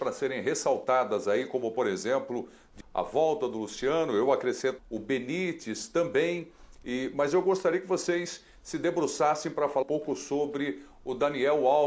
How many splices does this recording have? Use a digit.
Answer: 3